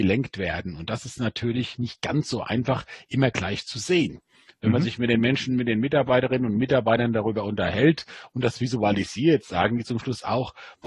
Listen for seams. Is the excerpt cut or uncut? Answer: uncut